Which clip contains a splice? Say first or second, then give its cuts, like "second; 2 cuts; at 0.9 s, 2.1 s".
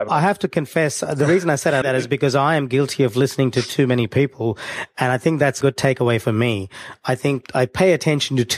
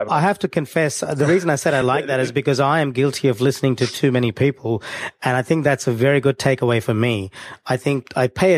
first; 2 cuts; at 1.8 s, 5.6 s